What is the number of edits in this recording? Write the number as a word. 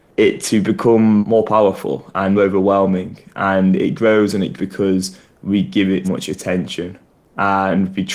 four